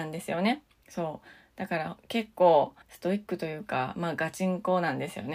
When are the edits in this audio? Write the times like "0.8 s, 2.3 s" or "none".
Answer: 2.8 s